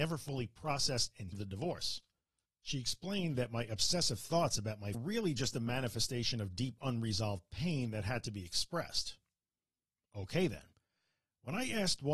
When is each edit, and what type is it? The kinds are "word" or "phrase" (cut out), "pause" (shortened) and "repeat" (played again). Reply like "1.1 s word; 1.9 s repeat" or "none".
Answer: 1.3 s phrase; 4.9 s phrase